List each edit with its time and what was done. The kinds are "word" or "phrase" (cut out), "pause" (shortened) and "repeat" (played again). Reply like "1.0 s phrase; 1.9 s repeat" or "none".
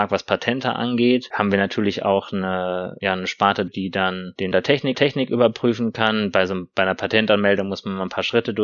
3.7 s word; 4.5 s word; 4.9 s repeat